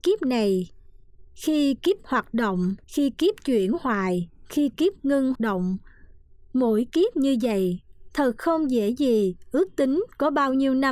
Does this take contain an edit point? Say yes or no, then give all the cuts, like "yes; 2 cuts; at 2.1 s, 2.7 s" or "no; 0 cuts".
yes; 3 cuts; at 2.0 s, 2.8 s, 5.4 s